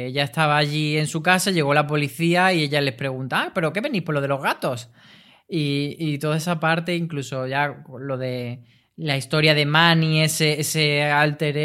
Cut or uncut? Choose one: uncut